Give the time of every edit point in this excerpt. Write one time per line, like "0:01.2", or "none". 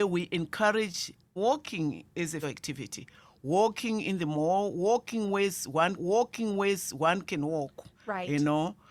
0:01.4
0:02.4
0:06.0
0:07.9